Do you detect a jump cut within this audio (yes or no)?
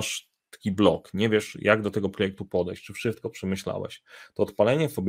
no